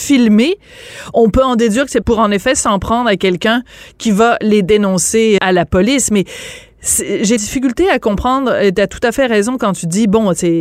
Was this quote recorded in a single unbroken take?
no; 3 cuts; at 2.0 s, 5.4 s, 7.4 s

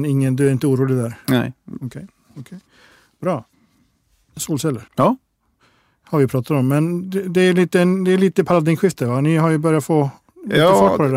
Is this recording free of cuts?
no; 1 cut; at 4.9 s

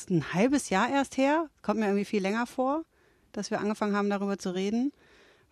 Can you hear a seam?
no; 0 cuts

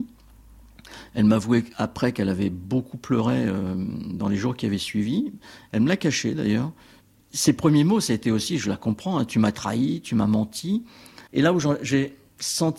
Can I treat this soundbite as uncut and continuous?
no; 2 cuts; at 7.0 s, 11.3 s

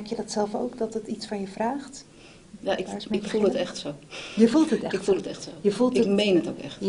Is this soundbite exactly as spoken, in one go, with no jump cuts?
yes; 0 cuts

